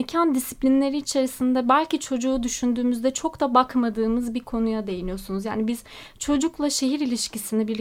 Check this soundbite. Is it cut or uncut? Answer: uncut